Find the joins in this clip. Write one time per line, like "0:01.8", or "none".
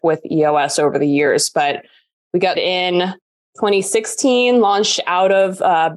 0:02.5